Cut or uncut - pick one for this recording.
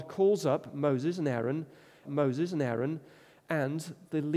cut